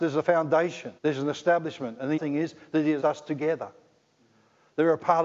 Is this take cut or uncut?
cut